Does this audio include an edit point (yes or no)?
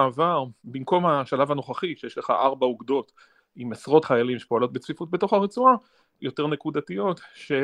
yes